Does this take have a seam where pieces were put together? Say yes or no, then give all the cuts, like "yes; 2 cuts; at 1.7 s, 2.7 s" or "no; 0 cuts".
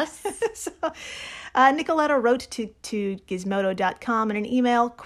no; 0 cuts